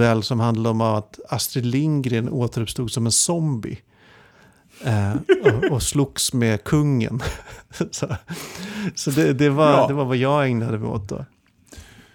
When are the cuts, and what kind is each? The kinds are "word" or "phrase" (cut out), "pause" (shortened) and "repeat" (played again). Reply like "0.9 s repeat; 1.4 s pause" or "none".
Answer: none